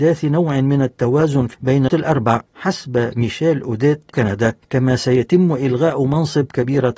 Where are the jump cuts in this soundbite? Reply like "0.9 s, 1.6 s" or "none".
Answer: 1.5 s, 1.9 s, 2.5 s, 4.1 s, 4.6 s